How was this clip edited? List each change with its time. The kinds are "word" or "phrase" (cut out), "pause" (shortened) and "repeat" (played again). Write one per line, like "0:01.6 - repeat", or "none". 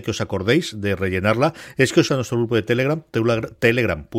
0:02.1 - word